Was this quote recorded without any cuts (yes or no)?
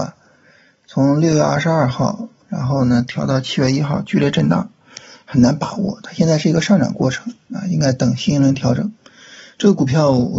yes